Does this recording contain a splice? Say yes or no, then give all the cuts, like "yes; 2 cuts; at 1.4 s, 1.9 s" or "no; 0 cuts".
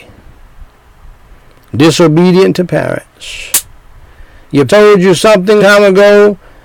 yes; 2 cuts; at 4.7 s, 5.6 s